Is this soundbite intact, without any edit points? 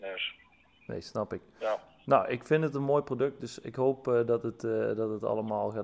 yes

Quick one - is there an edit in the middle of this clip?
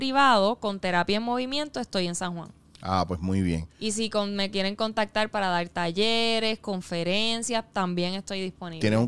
no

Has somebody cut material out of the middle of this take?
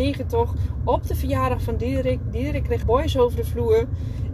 yes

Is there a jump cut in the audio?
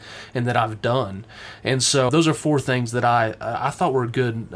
yes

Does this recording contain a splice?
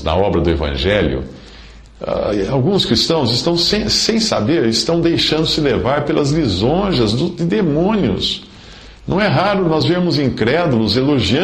no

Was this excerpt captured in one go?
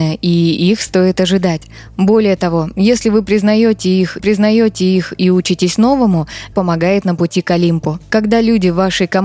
no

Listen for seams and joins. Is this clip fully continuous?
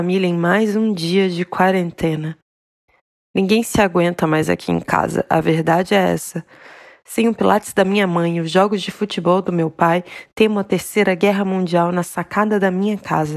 yes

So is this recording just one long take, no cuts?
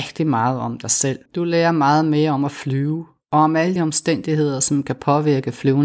no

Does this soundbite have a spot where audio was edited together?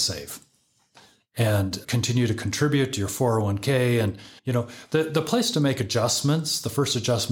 yes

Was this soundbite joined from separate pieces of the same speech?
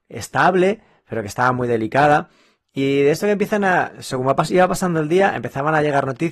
no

